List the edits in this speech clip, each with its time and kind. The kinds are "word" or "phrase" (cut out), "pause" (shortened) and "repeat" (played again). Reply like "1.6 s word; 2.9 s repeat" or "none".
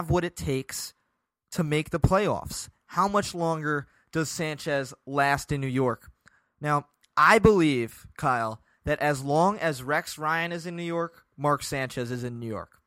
none